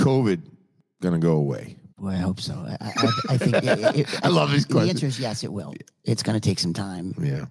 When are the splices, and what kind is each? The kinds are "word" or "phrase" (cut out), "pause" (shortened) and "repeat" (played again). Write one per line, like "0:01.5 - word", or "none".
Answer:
0:01.9 - pause